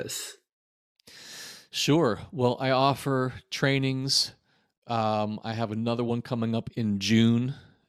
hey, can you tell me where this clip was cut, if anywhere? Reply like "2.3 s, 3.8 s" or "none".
none